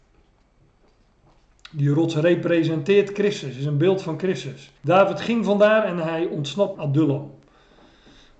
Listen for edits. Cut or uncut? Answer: cut